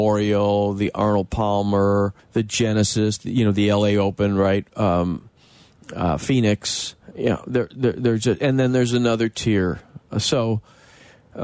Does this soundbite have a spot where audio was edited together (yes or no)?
yes